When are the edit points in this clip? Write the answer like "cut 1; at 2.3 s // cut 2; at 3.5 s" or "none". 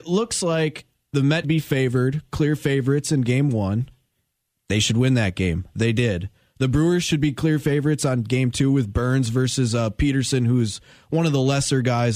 cut 1; at 1.4 s